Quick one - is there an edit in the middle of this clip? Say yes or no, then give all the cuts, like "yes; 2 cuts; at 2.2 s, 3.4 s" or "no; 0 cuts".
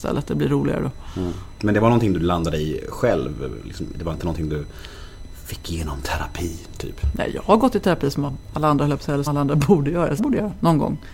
yes; 2 cuts; at 9.3 s, 10.2 s